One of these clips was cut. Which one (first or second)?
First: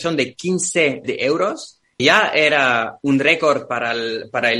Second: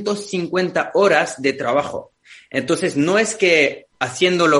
first